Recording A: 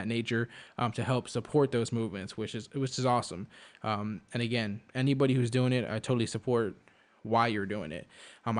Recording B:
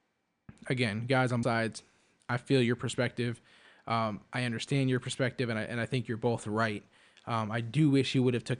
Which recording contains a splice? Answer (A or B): B